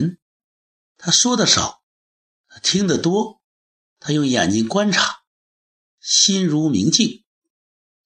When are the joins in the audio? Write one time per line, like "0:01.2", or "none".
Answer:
none